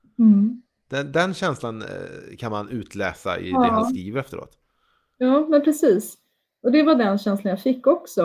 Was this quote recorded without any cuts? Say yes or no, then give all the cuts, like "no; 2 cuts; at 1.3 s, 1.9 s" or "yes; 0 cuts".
yes; 0 cuts